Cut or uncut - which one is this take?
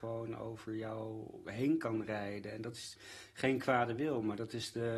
uncut